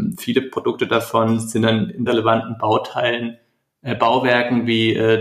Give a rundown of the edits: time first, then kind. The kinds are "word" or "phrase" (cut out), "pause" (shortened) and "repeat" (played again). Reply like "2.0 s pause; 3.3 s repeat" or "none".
2.1 s word